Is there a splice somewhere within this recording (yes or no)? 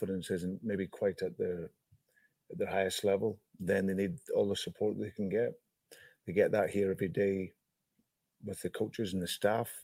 no